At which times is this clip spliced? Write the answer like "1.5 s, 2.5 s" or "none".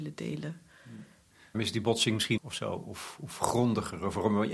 1.5 s, 2.4 s